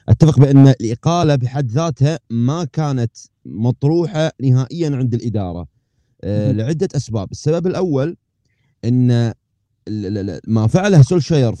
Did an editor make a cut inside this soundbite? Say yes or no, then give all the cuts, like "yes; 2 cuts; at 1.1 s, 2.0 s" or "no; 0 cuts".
no; 0 cuts